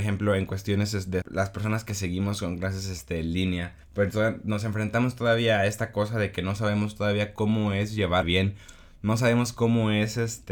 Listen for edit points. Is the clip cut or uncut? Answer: cut